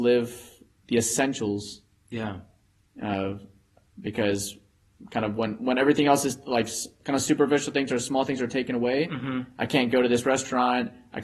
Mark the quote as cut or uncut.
uncut